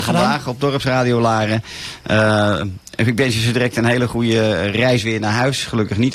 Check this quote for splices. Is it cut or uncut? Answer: uncut